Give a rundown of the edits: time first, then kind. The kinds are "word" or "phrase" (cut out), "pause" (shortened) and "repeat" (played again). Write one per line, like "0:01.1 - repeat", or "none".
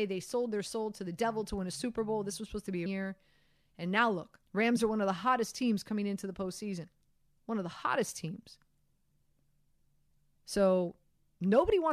0:02.9 - phrase
0:04.5 - pause